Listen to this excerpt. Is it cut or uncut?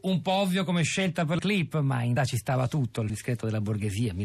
cut